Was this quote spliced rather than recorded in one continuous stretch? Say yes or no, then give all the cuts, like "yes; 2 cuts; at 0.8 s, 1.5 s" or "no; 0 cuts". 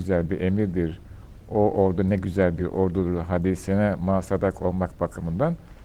no; 0 cuts